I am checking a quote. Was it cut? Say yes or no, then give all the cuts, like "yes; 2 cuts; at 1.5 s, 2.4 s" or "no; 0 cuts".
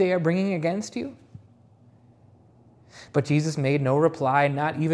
no; 0 cuts